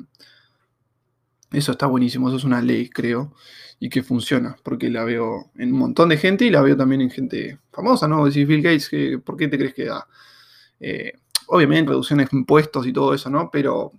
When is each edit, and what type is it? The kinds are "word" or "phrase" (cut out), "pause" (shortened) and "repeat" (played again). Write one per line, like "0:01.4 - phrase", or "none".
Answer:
0:11.9 - word